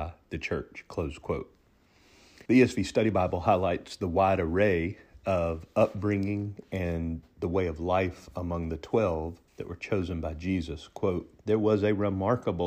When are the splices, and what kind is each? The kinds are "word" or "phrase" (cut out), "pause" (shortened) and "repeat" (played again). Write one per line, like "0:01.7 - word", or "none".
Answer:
0:02.5 - pause
0:09.5 - pause
0:11.4 - pause